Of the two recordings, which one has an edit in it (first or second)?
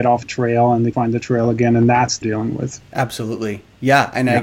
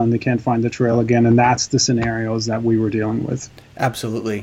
first